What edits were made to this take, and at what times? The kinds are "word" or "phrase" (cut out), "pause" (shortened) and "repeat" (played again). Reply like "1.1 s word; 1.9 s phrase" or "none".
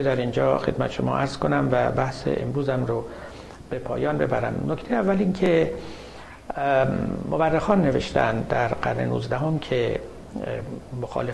none